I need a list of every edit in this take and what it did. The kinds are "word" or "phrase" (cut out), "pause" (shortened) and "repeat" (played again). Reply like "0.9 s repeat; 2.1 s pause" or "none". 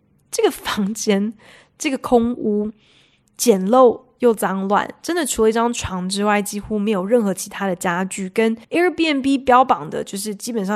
8.6 s pause